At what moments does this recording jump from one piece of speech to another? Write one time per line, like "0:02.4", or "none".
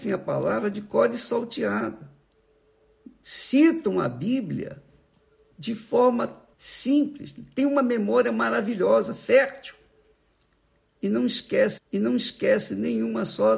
0:06.5
0:11.8